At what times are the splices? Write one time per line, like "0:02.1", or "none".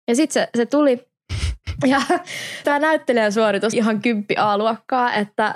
0:02.6
0:03.7